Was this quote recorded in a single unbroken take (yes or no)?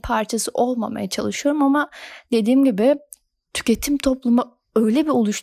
yes